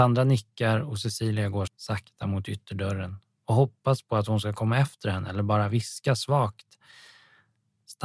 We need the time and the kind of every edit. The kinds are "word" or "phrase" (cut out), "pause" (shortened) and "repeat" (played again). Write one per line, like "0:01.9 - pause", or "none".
0:01.7 - word